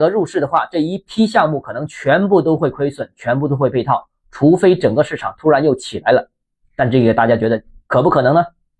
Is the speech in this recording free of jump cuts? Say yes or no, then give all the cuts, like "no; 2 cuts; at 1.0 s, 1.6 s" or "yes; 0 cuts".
yes; 0 cuts